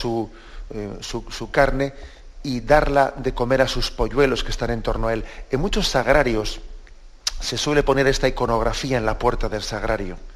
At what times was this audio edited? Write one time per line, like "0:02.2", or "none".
none